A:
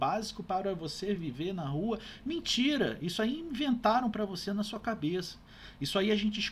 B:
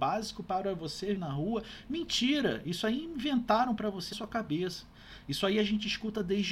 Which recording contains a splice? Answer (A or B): B